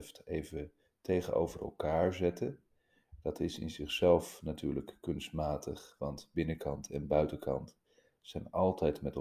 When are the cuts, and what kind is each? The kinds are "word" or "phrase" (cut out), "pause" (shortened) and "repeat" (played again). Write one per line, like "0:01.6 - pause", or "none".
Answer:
none